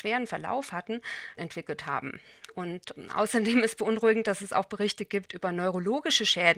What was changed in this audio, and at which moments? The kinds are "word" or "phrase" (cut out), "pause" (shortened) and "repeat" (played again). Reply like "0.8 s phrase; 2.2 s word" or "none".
1.4 s word

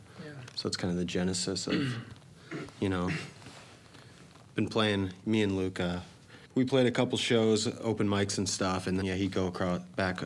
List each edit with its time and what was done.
6.7 s word; 9.0 s word

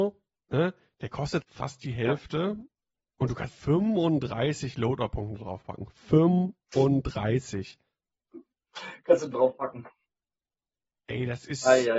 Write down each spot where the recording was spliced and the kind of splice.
1.4 s phrase; 3.0 s pause; 3.5 s word; 9.3 s word

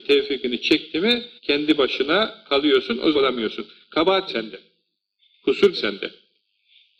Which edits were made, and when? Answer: 1.4 s pause; 3.1 s phrase; 4.3 s word; 5.7 s word

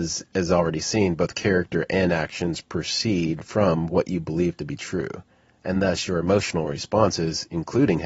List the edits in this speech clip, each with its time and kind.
none

